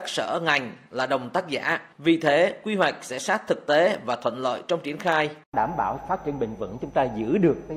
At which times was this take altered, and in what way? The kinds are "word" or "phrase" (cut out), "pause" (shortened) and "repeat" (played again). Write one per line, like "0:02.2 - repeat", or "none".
0:01.9 - pause
0:05.4 - pause